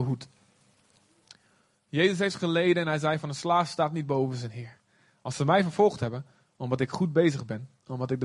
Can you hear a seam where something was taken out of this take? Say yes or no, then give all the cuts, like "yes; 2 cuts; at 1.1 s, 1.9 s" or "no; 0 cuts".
no; 0 cuts